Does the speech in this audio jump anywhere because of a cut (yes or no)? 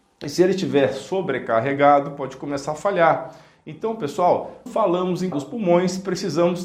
yes